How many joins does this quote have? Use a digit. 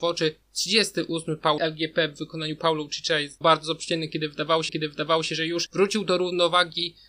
3